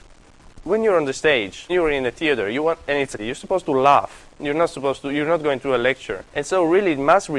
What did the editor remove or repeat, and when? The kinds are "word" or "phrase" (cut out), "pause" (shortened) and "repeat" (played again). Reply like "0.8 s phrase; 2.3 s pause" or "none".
1.7 s word; 3.2 s word; 4.3 s pause; 6.3 s pause